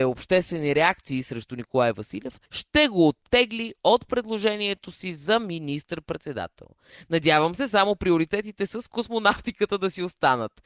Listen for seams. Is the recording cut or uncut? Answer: cut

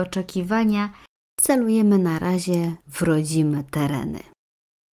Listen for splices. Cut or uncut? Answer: uncut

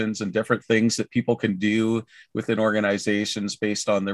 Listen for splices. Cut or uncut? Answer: uncut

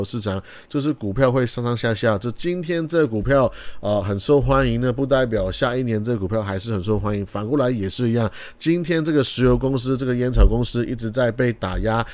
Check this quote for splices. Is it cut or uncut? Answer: uncut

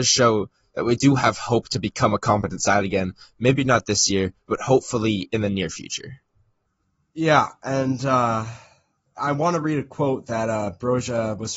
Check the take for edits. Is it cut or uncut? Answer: cut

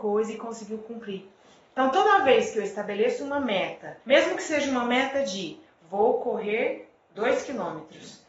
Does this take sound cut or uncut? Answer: cut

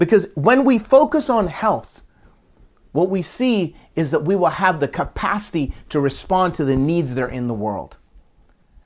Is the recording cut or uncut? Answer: uncut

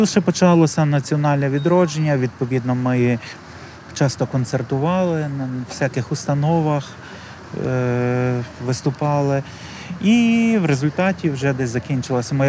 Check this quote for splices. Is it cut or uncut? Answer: uncut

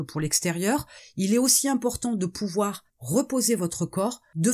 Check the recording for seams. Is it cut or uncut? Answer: uncut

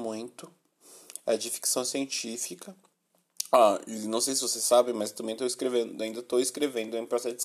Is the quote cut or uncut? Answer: uncut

